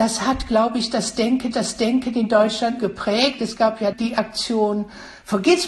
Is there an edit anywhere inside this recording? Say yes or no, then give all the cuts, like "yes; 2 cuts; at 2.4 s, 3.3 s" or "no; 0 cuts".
yes; 3 cuts; at 1.5 s, 2.8 s, 3.9 s